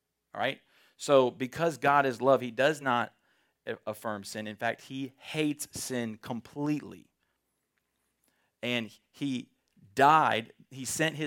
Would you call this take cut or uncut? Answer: uncut